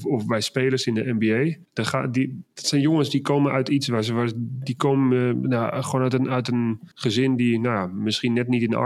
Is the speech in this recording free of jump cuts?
no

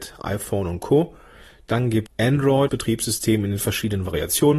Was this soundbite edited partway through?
yes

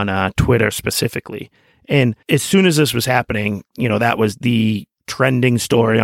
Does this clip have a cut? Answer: no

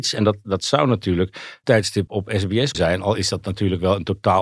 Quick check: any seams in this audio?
yes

